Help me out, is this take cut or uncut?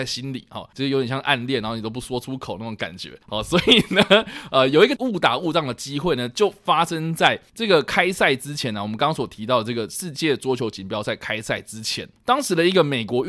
uncut